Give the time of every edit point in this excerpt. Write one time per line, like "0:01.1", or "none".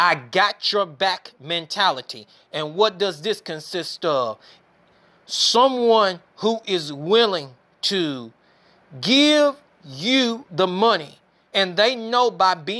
none